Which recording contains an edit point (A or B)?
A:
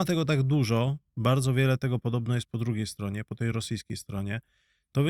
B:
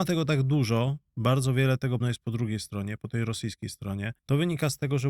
B